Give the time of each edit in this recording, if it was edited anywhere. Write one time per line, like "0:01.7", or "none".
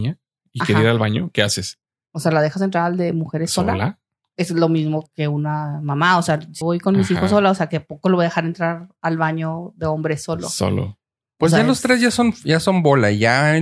0:05.1
0:06.6